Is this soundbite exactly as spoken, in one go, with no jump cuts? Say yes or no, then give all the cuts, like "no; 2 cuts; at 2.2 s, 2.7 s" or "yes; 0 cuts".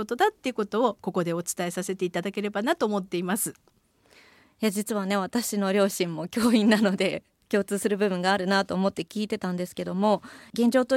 yes; 0 cuts